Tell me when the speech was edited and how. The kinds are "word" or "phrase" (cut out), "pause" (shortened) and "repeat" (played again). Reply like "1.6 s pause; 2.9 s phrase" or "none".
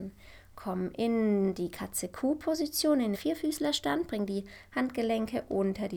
3.1 s word